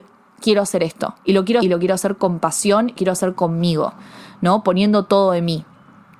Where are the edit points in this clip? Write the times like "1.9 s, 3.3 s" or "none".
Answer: 1.2 s, 1.6 s, 3.0 s